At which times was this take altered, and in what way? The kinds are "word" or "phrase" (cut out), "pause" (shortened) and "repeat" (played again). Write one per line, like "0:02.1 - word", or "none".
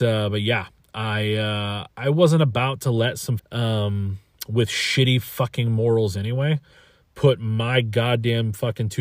0:03.4 - phrase